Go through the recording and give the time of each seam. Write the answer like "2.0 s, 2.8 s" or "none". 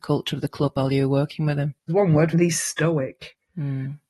1.8 s, 2.3 s